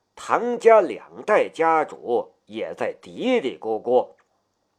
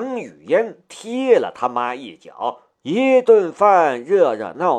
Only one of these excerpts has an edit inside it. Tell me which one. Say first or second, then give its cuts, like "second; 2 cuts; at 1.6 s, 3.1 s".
second; 1 cut; at 2.7 s